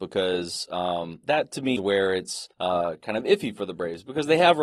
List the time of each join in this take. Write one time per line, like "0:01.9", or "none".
0:01.2
0:01.8
0:02.5